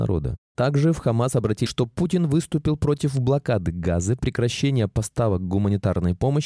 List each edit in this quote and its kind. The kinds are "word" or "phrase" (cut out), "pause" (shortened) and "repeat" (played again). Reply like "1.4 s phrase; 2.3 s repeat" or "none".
1.7 s word